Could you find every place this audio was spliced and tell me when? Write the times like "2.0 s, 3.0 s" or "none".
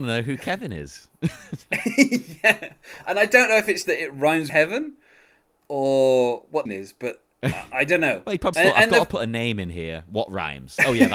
3.8 s, 4.5 s, 6.7 s, 8.5 s